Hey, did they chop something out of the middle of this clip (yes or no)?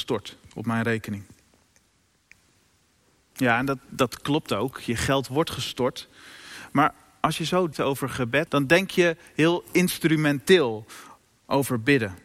yes